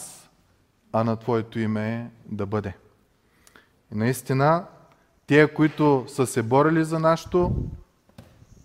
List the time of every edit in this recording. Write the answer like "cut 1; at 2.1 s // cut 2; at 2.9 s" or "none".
none